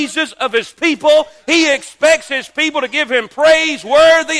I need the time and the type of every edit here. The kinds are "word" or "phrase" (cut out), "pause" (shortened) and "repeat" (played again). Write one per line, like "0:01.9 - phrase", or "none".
none